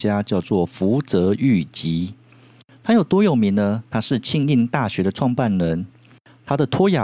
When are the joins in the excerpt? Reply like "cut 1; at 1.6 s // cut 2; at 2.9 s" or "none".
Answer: cut 1; at 3.9 s